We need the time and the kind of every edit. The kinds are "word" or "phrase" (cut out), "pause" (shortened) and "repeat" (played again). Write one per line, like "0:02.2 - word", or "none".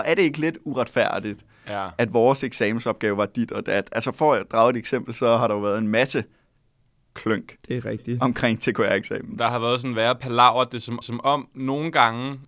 0:11.0 - repeat